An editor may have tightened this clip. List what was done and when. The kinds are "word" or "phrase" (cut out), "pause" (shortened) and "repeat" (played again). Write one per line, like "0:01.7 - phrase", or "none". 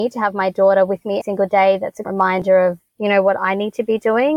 0:01.2 - word
0:02.0 - word
0:02.9 - pause